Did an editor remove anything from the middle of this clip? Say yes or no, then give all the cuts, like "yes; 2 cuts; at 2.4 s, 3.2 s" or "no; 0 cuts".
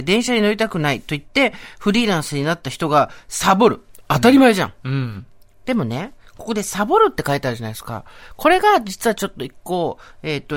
no; 0 cuts